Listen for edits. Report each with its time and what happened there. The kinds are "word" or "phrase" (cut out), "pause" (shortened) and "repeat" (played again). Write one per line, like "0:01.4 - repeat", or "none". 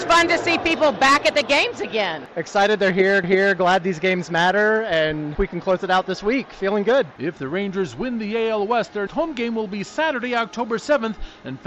0:03.2 - repeat
0:05.3 - word
0:09.1 - word